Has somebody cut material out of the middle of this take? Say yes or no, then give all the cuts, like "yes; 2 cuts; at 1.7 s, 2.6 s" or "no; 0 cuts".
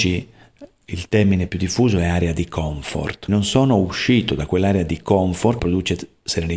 yes; 2 cuts; at 3.3 s, 5.6 s